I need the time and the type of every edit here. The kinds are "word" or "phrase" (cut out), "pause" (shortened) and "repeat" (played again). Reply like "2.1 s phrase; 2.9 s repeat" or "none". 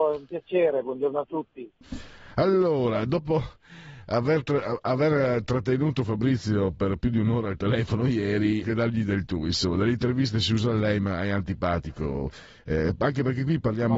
8.6 s phrase